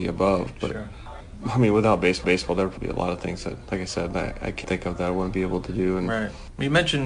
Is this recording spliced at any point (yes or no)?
yes